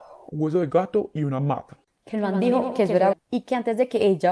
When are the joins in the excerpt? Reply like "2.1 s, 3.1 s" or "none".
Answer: 3.1 s